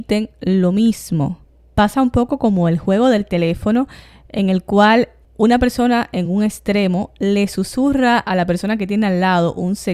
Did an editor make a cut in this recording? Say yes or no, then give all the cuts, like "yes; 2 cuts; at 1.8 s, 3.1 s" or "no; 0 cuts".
no; 0 cuts